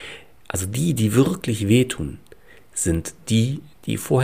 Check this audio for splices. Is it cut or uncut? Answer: uncut